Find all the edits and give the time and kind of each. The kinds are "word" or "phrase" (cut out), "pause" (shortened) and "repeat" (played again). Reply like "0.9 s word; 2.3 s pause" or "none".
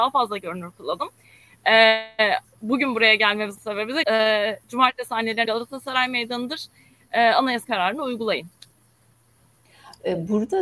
2.4 s word; 3.6 s word; 4.0 s word; 5.4 s word; 7.6 s word